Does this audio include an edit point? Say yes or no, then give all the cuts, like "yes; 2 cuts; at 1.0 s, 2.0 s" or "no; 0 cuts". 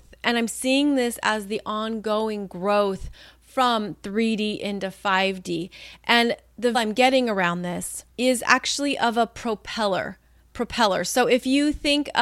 yes; 2 cuts; at 6.7 s, 8.1 s